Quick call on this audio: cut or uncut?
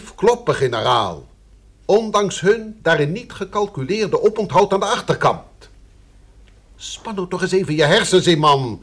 uncut